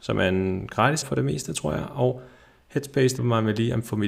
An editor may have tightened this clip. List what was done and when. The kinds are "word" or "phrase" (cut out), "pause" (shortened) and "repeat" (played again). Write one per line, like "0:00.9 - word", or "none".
0:01.0 - word
0:03.2 - word

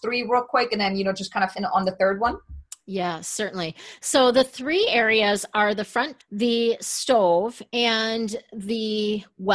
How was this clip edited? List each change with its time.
0:01.5 - phrase
0:06.2 - word

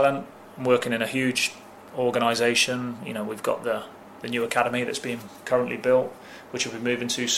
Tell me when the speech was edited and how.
none

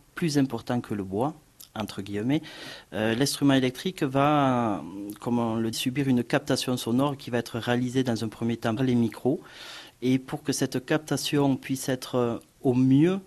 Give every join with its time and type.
0:05.7 - word
0:08.8 - word

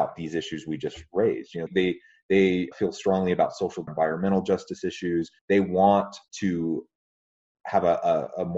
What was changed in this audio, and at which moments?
0:01.7 - word
0:02.7 - word
0:03.9 - phrase
0:05.4 - pause
0:06.3 - pause

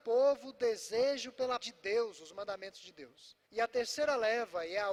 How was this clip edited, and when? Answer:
0:01.6 - word
0:03.4 - pause

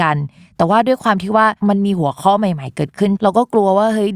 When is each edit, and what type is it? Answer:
0:01.6 - pause

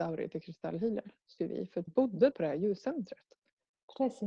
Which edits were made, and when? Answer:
0:01.4 - word
0:01.9 - word
0:02.3 - word

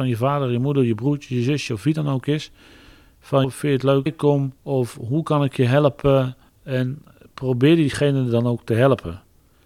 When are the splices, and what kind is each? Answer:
0:03.4 - word
0:04.1 - phrase
0:04.6 - pause

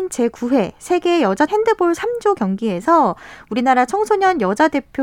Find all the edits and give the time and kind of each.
0:01.5 - word
0:02.0 - phrase

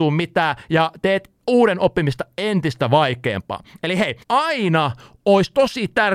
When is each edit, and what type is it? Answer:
0:04.2 - pause

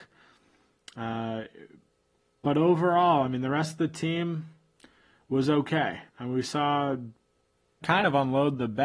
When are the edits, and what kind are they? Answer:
0:06.1 - pause
0:07.8 - word

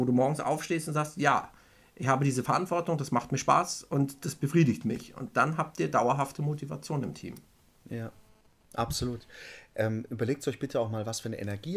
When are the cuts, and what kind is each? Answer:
none

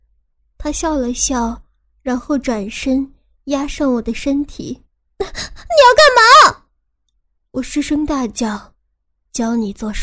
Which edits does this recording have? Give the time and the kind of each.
0:04.8 - pause
0:08.8 - pause

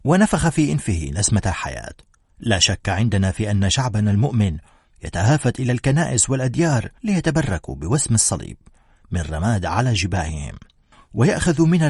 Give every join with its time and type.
0:07.0 - pause

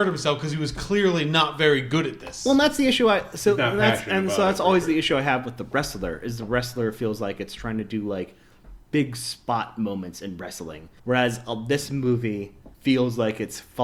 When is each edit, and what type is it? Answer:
0:11.0 - pause
0:12.7 - pause

